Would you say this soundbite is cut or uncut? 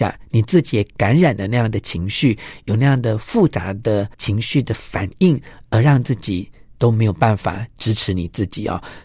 cut